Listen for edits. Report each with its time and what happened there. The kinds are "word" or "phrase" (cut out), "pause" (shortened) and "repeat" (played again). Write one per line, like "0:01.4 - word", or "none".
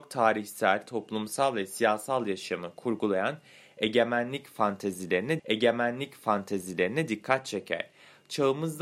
0:05.4 - repeat